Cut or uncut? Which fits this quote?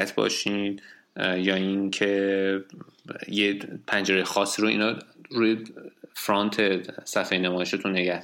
uncut